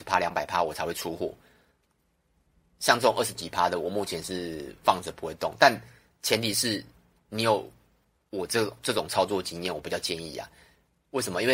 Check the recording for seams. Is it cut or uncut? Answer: uncut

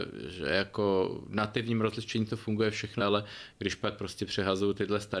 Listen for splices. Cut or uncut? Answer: cut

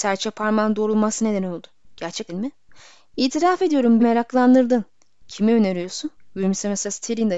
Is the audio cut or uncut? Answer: cut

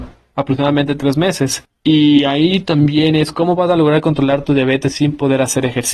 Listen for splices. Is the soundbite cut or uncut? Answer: uncut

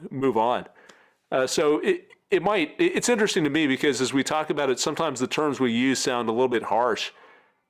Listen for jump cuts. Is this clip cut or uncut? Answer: uncut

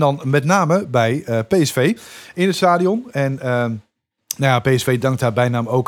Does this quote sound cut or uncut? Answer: uncut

